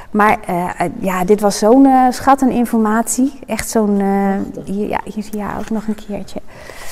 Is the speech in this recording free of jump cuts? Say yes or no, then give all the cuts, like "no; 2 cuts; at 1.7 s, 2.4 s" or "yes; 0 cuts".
yes; 0 cuts